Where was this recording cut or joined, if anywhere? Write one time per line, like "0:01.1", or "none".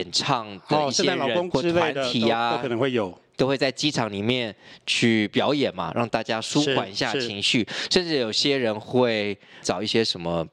0:01.5
0:09.6